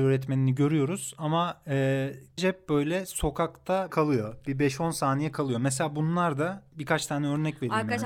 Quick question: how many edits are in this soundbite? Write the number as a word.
two